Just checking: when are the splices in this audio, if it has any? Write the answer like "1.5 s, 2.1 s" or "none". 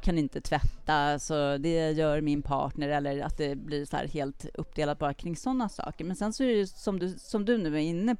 none